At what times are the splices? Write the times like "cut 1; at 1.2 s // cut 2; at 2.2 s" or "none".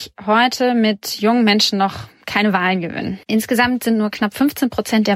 cut 1; at 3.2 s